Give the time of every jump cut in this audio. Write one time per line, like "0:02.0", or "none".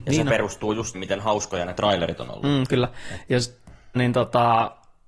0:00.9
0:04.0